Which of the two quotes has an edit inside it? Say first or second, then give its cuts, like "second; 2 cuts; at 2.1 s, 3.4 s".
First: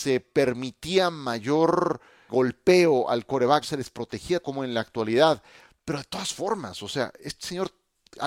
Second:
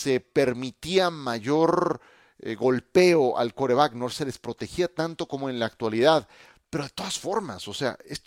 first; 3 cuts; at 2.3 s, 3.6 s, 4.4 s